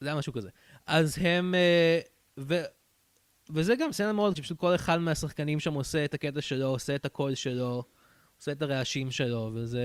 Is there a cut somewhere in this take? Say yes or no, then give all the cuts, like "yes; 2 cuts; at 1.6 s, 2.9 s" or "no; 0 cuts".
yes; 1 cut; at 4.4 s